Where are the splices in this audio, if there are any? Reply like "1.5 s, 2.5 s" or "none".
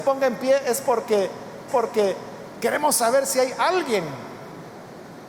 1.7 s